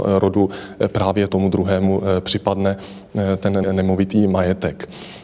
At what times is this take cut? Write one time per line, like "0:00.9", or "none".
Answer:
0:01.3
0:03.6

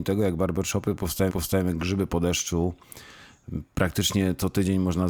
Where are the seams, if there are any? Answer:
0:01.3

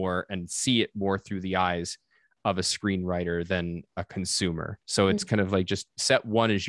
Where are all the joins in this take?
0:04.8

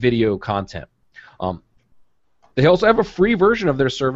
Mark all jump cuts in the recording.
none

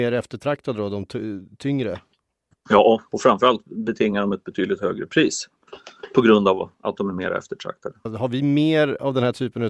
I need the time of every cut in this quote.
0:03.1
0:06.7

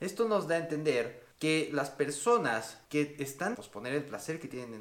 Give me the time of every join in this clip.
0:01.3
0:02.8
0:03.5

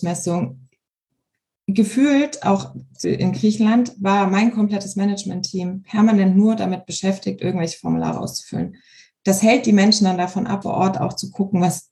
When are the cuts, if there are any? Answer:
0:03.0
0:10.6

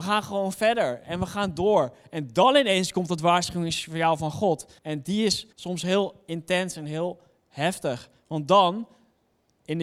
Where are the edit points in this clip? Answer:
0:04.8
0:05.5

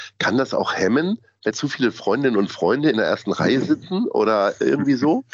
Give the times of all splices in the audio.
0:01.5

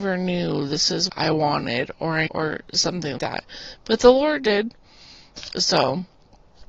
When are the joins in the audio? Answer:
0:01.1
0:02.3
0:03.2

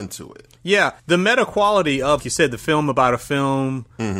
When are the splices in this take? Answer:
0:01.0
0:02.2

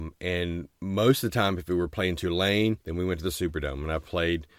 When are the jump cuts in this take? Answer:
0:02.8

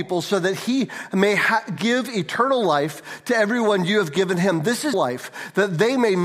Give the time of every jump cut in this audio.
0:04.9

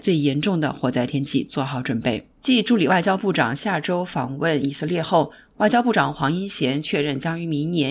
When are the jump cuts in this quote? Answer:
0:02.3

